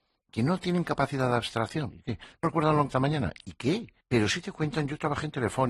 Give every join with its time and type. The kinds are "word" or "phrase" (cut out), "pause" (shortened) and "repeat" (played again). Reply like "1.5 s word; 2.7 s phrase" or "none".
1.9 s word; 2.4 s word; 2.9 s phrase; 4.0 s pause